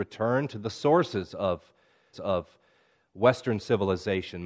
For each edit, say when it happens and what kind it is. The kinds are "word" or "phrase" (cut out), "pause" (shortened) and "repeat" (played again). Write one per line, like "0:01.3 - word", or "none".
0:02.1 - repeat